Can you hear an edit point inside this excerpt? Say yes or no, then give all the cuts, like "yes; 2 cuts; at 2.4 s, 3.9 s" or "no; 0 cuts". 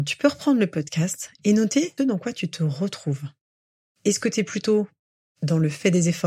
yes; 1 cut; at 2.0 s